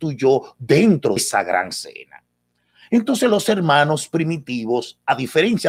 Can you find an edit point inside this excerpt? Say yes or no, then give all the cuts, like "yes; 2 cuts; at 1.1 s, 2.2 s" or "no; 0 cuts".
yes; 1 cut; at 1.2 s